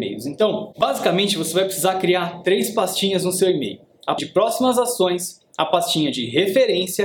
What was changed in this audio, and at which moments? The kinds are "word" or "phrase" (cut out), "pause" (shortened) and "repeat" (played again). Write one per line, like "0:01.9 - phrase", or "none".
0:04.2 - word

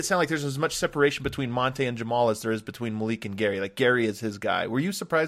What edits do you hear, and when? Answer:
none

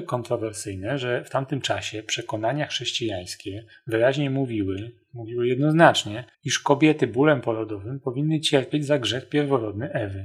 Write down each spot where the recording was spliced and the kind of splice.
0:06.3 - pause

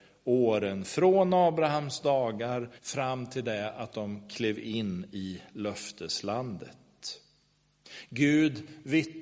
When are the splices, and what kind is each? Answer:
0:02.8 - pause

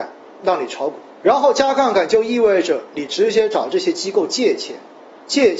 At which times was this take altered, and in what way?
0:01.1 - pause

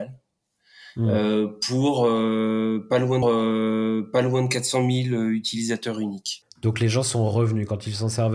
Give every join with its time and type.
0:03.2 - repeat

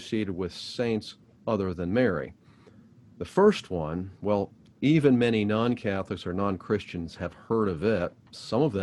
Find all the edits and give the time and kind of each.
0:01.2 - pause

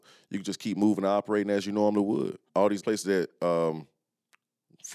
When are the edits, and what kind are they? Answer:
0:02.5 - pause
0:02.8 - word

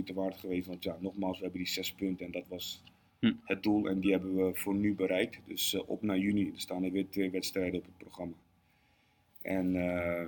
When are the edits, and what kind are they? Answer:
none

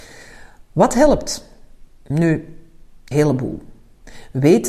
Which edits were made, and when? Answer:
0:03.1 - word

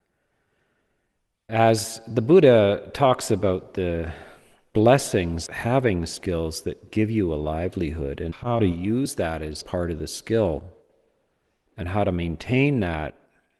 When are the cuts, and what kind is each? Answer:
0:05.5 - word
0:09.6 - word

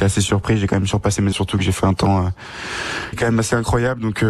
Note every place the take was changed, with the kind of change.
0:01.3 - word
0:03.1 - word

